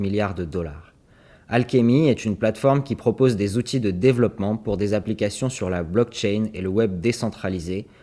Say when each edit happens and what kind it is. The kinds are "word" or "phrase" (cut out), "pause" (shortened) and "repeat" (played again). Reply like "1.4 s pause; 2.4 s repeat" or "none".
none